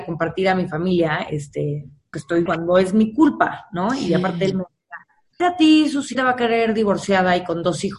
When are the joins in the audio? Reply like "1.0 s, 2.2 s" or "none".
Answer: 2.1 s, 2.5 s, 5.4 s, 6.1 s